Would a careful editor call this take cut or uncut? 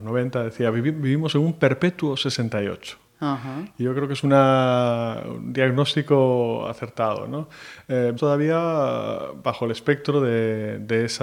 cut